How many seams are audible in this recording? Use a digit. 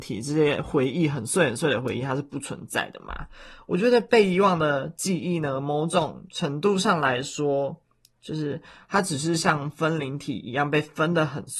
0